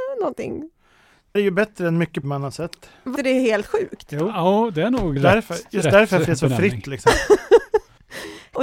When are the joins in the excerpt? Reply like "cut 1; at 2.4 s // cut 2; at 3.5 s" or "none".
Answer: cut 1; at 1.4 s // cut 2; at 2.2 s // cut 3; at 3.2 s // cut 4; at 5.2 s // cut 5; at 6.3 s